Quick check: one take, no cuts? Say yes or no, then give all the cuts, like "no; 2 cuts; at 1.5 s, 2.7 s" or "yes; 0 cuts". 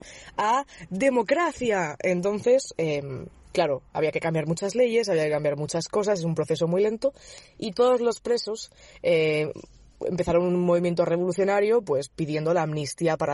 yes; 0 cuts